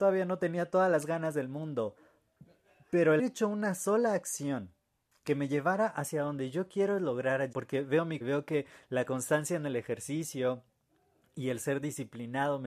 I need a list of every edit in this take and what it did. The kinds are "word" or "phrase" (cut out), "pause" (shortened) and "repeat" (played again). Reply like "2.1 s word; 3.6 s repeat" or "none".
3.2 s word; 7.5 s word; 8.2 s word